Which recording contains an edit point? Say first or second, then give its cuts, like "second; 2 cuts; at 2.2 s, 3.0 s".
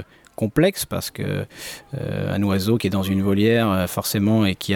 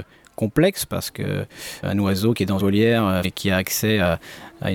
second; 3 cuts; at 1.8 s, 2.6 s, 3.2 s